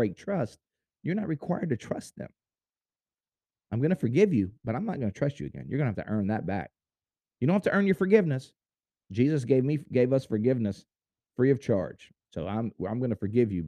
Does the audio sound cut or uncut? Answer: uncut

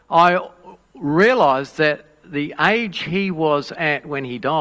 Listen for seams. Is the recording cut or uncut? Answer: uncut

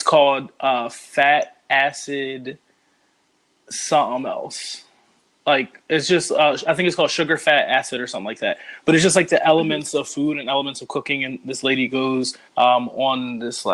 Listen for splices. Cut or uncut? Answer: cut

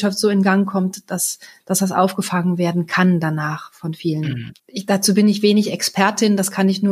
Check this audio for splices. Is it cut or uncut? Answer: cut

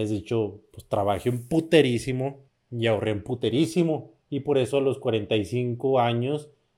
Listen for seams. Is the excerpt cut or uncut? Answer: cut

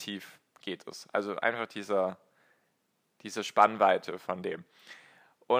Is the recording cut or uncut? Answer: uncut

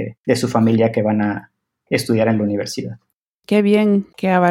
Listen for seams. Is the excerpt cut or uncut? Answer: uncut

